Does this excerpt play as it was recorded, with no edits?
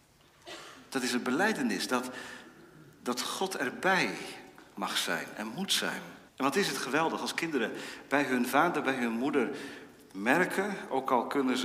no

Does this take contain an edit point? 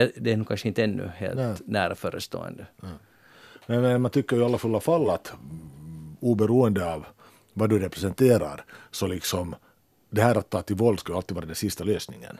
no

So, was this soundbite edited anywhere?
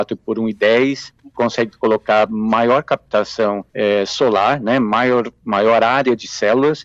yes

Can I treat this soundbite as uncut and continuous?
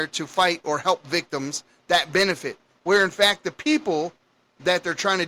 yes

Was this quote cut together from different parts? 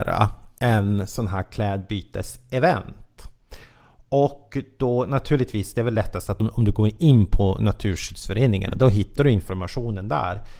no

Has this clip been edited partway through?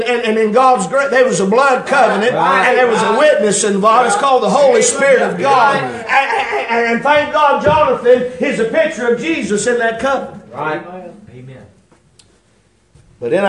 no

